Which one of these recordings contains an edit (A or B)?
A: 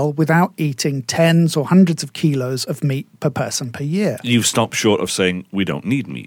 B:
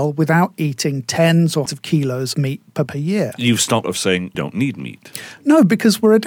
B